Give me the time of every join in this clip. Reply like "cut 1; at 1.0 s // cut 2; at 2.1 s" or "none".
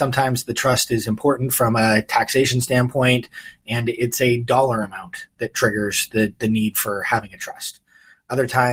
none